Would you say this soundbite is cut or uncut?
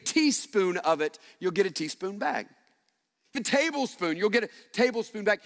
cut